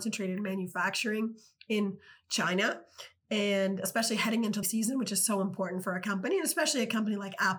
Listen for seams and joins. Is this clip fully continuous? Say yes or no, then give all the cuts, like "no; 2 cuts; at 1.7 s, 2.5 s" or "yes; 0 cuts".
no; 1 cut; at 4.6 s